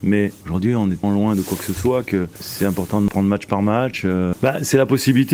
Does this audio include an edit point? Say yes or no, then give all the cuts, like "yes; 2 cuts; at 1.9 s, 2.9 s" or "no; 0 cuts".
yes; 1 cut; at 1.0 s